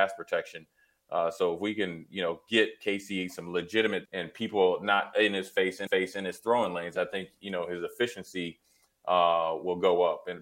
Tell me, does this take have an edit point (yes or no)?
yes